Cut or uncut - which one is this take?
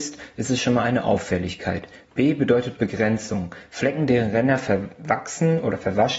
uncut